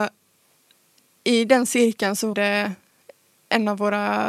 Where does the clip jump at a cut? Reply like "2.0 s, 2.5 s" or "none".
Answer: 2.3 s